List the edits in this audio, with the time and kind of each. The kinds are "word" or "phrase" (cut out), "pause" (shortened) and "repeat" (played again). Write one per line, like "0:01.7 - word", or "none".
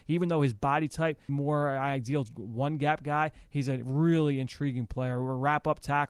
0:01.3 - phrase